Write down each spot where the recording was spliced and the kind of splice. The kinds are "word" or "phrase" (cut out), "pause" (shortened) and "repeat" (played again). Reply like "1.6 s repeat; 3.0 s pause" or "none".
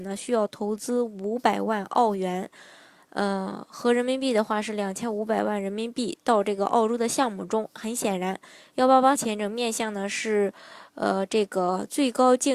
9.1 s word

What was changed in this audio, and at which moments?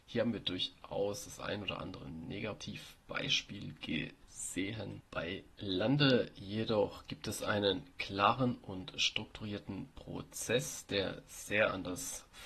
5.1 s pause

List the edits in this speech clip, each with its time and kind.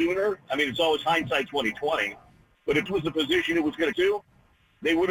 1.5 s word; 2.9 s word; 3.9 s phrase

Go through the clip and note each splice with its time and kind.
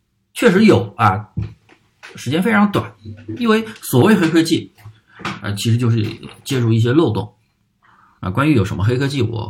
none

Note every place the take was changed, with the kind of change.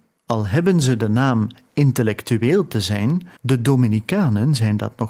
3.4 s pause

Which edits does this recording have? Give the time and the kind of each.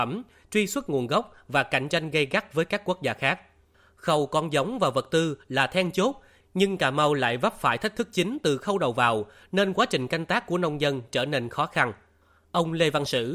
none

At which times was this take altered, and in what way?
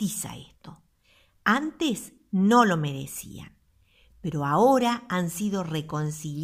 none

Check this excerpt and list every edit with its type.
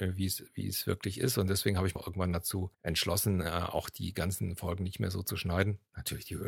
2.0 s word; 2.7 s pause

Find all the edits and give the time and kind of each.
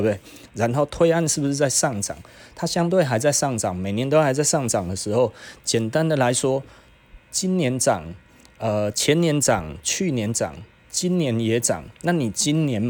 none

